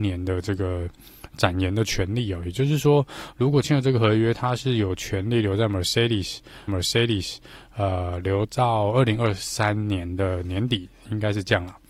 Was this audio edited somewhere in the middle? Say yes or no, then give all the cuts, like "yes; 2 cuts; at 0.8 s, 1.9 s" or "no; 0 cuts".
yes; 1 cut; at 6.7 s